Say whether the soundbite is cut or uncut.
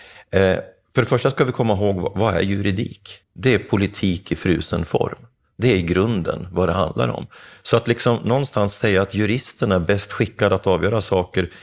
cut